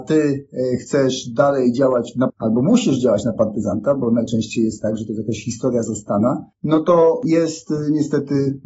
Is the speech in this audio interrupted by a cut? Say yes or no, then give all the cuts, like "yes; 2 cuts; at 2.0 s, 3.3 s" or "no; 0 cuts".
yes; 2 cuts; at 2.3 s, 6.5 s